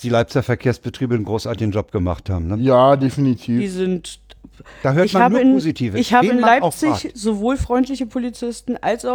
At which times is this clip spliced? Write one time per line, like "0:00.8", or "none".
none